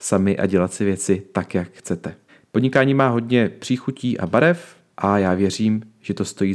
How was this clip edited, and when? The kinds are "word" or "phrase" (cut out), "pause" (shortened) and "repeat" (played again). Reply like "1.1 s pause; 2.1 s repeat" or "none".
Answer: 2.3 s pause; 4.9 s pause